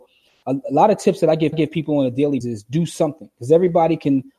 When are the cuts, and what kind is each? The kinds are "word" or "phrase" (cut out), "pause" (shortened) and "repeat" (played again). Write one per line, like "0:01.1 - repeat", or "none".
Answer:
0:01.5 - repeat
0:02.4 - word